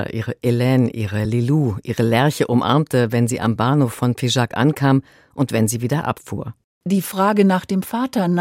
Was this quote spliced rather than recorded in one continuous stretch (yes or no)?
no